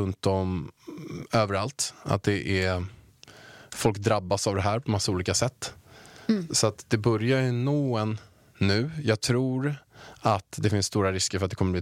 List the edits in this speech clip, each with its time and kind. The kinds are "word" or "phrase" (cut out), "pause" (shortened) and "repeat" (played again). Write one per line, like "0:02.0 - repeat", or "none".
none